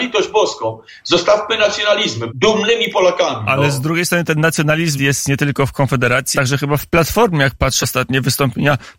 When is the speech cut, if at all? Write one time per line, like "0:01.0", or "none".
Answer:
0:02.3
0:05.0
0:06.3
0:07.8